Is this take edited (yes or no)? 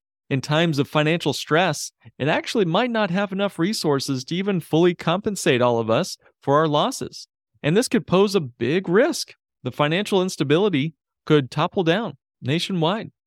no